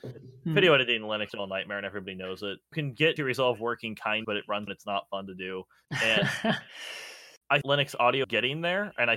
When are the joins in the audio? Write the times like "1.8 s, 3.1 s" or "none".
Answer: 1.3 s, 2.7 s, 3.2 s, 4.2 s, 4.7 s, 7.6 s, 8.2 s